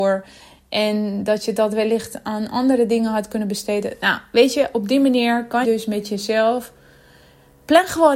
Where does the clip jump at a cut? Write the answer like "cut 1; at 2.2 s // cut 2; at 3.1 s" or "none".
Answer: cut 1; at 5.6 s